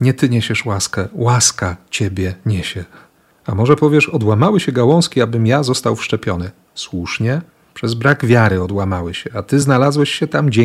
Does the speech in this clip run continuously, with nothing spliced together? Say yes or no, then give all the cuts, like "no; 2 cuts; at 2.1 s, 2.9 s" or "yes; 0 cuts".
yes; 0 cuts